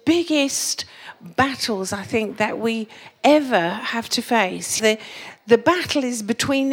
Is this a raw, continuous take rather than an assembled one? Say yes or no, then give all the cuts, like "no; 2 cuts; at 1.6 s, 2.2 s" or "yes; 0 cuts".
no; 1 cut; at 4.8 s